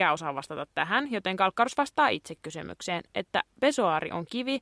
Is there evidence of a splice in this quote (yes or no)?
no